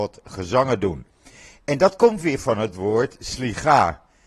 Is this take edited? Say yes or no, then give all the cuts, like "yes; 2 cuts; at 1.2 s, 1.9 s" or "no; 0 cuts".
no; 0 cuts